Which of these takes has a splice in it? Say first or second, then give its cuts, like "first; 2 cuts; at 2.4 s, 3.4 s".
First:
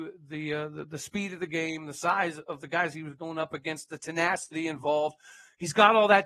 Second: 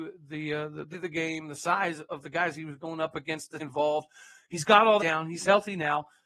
second; 3 cuts; at 0.9 s, 3.6 s, 5.0 s